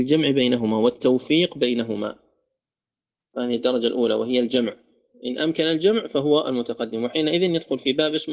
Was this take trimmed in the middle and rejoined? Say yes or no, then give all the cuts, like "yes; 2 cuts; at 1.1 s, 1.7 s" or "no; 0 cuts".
no; 0 cuts